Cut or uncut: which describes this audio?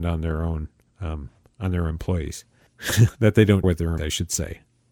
cut